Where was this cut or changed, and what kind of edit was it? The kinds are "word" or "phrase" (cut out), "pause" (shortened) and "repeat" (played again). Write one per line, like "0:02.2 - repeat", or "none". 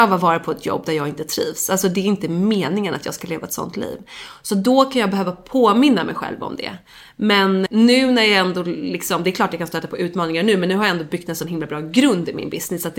0:07.7 - word